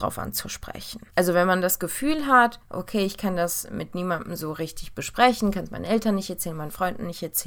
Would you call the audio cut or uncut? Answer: cut